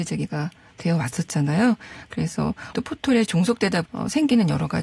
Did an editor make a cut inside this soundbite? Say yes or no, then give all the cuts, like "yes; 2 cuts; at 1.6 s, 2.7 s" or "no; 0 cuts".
yes; 2 cuts; at 2.7 s, 3.9 s